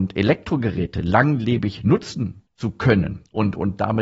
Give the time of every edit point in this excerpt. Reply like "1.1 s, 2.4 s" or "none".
2.5 s